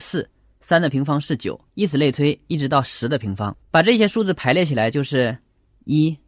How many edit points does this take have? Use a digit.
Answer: 2